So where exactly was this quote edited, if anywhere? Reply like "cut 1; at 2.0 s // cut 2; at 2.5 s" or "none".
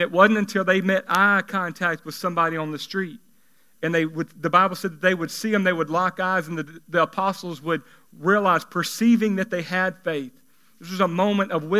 none